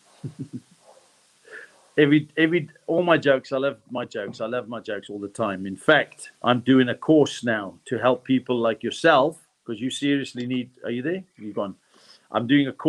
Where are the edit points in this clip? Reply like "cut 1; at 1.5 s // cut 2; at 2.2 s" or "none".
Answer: cut 1; at 6.4 s // cut 2; at 9.6 s